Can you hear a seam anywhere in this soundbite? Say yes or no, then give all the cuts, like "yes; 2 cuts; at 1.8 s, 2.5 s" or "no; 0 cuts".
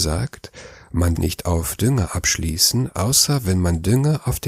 yes; 1 cut; at 1.2 s